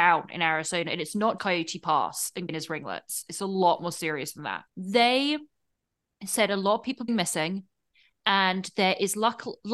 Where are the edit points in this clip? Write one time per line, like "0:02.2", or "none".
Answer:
0:01.4
0:02.5
0:04.7
0:07.1